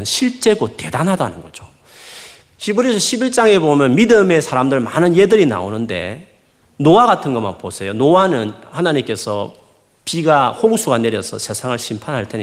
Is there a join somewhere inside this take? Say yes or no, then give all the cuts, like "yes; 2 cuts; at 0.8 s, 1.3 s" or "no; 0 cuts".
no; 0 cuts